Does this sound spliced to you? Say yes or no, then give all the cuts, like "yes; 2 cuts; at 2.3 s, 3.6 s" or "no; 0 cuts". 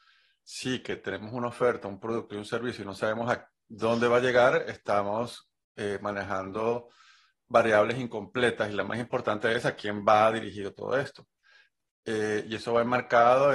no; 0 cuts